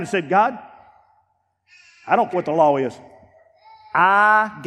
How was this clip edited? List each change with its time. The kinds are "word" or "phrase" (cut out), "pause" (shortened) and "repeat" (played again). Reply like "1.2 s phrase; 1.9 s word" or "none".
2.3 s word